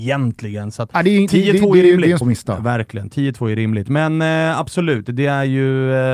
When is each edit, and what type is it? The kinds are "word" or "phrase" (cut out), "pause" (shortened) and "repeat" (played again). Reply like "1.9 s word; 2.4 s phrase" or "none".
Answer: 2.2 s phrase